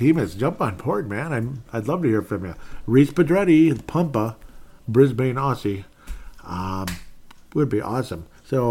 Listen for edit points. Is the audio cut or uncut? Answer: cut